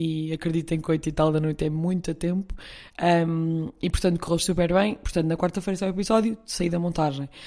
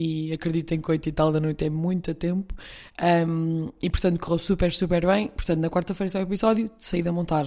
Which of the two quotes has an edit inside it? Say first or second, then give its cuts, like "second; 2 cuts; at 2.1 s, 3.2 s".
first; 1 cut; at 4.4 s